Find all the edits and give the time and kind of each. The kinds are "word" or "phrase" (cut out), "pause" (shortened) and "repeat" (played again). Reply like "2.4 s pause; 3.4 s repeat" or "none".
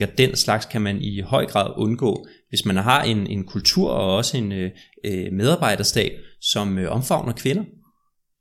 none